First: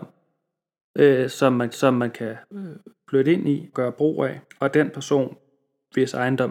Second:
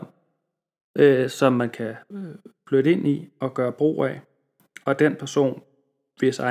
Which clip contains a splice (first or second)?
first